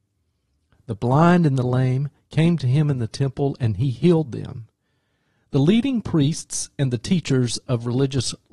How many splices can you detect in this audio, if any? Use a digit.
0